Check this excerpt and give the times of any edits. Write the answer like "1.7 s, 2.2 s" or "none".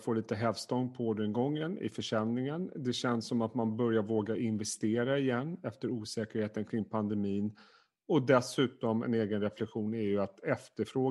none